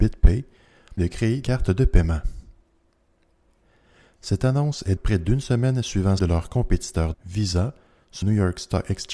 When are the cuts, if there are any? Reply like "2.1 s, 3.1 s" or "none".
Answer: 1.0 s, 1.4 s, 5.0 s, 6.2 s, 7.1 s, 8.2 s